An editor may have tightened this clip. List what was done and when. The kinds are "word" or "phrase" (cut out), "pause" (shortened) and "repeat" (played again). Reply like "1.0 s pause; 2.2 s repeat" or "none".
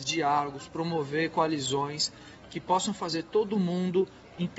none